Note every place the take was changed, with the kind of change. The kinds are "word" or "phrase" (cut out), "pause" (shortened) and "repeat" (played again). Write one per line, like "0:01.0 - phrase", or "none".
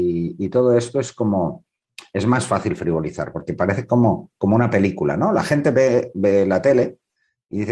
none

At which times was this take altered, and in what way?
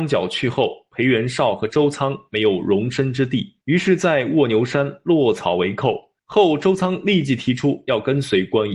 0:03.6 - pause
0:06.2 - pause

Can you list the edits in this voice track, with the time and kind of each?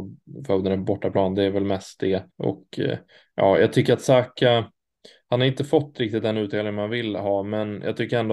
0:02.3 - pause

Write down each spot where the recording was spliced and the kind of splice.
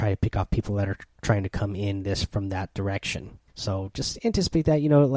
0:03.5 - pause

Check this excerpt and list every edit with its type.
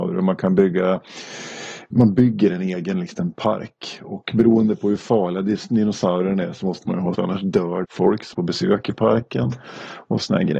0:07.1 - word
0:07.8 - word
0:08.3 - word

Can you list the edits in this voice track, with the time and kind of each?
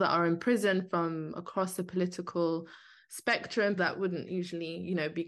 0:03.8 - word

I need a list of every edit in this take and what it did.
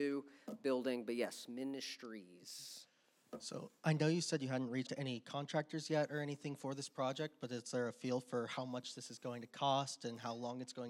0:04.9 - word

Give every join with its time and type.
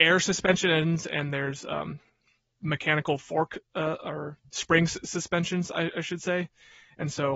none

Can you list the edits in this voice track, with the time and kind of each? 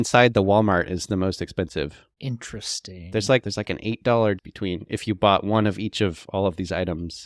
0:02.1 - pause
0:03.4 - word
0:04.4 - word

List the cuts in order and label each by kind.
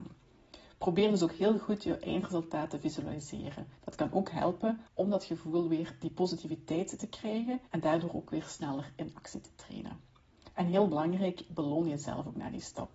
0:03.8 - pause
0:04.9 - pause
0:07.7 - pause

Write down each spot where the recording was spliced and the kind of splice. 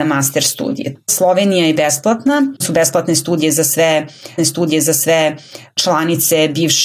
0:02.6 - word
0:04.4 - repeat

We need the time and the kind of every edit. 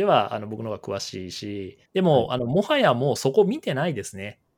0:01.9 - pause

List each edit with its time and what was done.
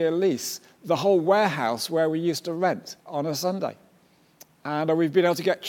0:03.0 - pause

